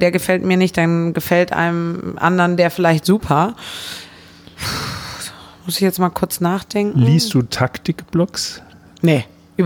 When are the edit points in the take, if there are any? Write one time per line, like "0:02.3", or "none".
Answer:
none